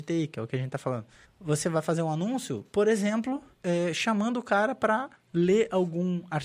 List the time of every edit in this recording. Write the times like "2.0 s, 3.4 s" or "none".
1.2 s, 2.7 s, 3.5 s, 5.1 s